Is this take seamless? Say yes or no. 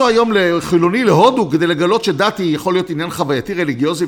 yes